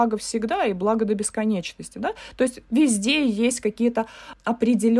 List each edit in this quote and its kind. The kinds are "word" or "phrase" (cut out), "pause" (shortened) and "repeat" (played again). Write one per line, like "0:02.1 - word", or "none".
none